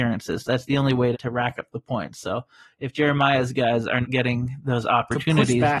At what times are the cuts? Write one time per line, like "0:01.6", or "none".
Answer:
0:01.1
0:04.0